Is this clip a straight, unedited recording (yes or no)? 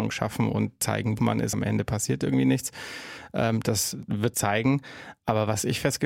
no